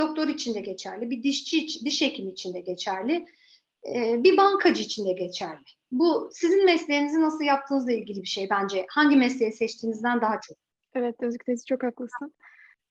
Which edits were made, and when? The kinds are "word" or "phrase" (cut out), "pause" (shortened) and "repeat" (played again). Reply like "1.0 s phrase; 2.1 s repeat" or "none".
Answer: 10.8 s pause